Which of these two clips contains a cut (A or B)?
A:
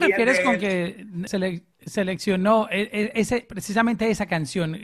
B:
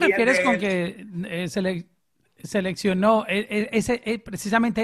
A